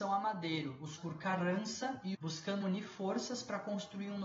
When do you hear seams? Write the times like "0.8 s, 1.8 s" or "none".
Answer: 1.0 s, 2.1 s, 2.6 s